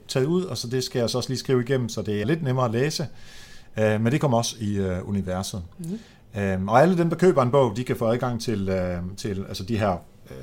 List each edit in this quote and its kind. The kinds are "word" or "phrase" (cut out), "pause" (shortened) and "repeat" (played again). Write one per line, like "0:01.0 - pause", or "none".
0:02.2 - word